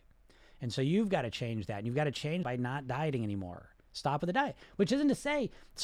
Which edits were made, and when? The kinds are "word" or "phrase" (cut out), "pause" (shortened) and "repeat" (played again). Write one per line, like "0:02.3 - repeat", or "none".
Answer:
0:02.4 - word